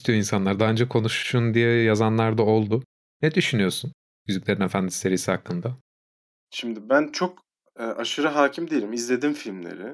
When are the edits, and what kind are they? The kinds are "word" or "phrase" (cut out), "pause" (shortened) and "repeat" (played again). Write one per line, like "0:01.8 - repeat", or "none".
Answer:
none